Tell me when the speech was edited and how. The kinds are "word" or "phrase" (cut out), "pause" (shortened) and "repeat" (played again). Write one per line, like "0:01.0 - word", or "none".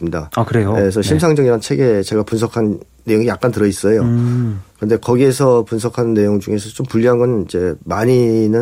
none